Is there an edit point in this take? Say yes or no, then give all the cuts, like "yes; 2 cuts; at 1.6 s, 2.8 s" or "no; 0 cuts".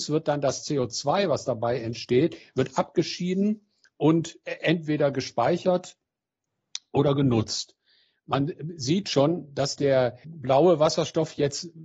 yes; 1 cut; at 10.2 s